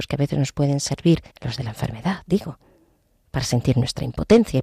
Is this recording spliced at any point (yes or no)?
yes